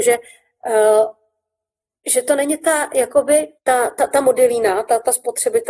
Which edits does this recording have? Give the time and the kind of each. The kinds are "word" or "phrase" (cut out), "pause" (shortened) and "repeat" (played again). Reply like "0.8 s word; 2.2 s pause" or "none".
3.6 s pause